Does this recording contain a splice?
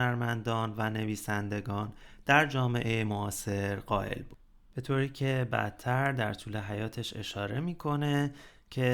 no; 0 cuts

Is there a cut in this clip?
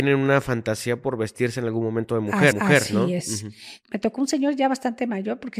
yes; 1 cut; at 2.5 s

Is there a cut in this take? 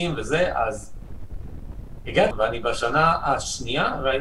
yes; 1 cut; at 2.3 s

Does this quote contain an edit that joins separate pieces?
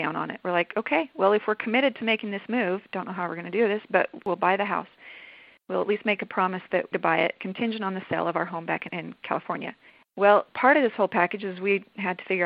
yes; 1 cut; at 6.9 s

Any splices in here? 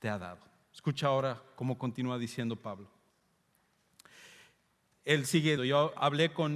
yes; 1 cut; at 5.6 s

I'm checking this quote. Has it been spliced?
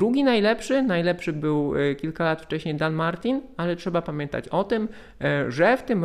no; 0 cuts

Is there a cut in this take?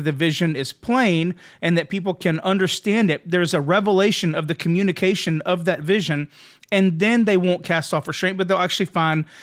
no; 0 cuts

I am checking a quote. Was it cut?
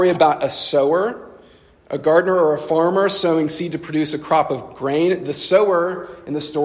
no; 0 cuts

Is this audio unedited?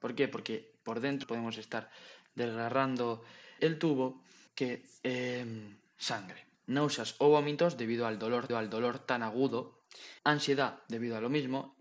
no; 6 cuts; at 1.2 s, 3.6 s, 4.5 s, 6.5 s, 8.5 s, 10.2 s

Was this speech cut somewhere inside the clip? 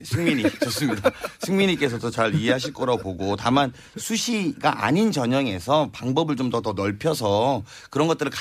no; 0 cuts

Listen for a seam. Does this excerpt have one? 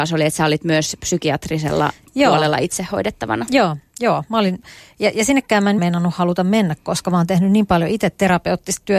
yes; 1 cut; at 5.8 s

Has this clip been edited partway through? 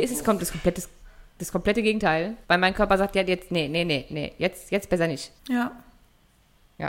yes; 2 cuts; at 2.4 s, 5.4 s

